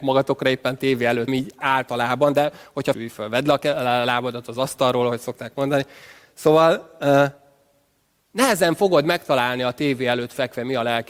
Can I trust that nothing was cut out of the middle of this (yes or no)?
no